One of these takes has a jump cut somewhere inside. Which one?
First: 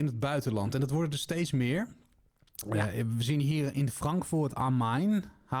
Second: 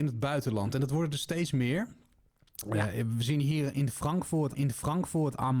second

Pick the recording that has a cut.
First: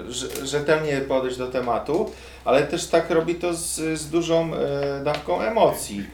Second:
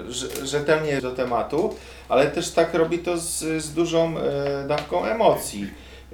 second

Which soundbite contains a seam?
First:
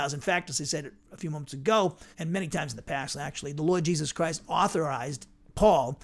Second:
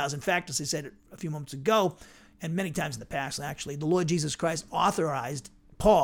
first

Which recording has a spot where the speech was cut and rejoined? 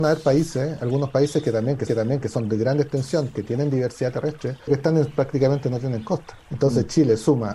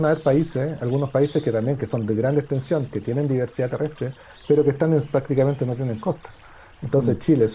first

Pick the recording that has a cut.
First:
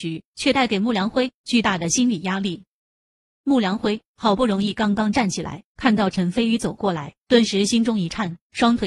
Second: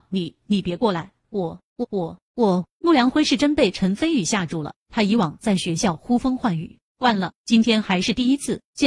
second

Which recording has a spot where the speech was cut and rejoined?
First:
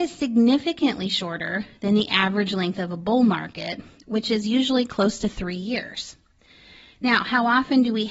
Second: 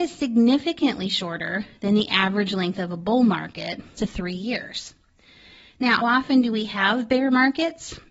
second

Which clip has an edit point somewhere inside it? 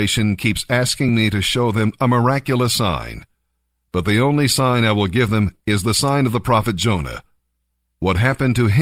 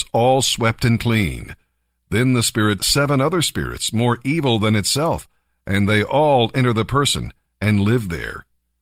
second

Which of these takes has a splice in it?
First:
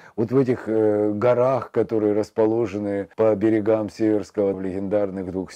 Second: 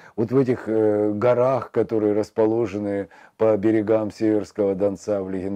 first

